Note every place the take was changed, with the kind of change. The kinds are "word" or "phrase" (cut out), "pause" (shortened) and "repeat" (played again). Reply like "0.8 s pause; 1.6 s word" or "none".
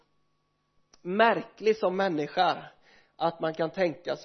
none